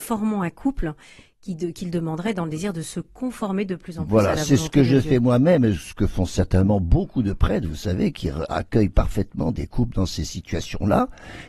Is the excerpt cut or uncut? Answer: uncut